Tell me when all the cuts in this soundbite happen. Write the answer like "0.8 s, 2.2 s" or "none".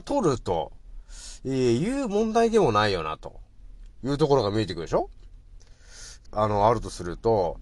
6.3 s